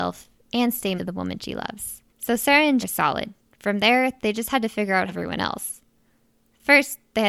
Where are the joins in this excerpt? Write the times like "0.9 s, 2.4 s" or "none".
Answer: 1.0 s, 2.1 s, 2.8 s, 3.4 s, 5.1 s